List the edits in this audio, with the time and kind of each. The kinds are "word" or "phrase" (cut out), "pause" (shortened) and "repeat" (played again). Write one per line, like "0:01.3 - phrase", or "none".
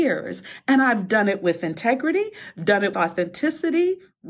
0:02.9 - word